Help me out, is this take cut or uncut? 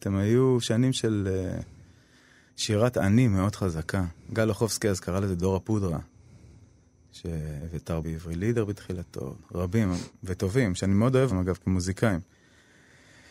cut